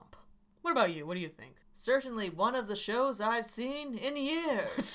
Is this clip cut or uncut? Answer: cut